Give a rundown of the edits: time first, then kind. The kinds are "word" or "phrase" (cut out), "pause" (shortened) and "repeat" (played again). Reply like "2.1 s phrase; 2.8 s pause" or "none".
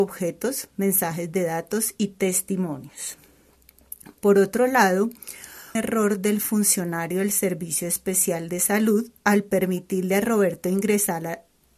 5.7 s phrase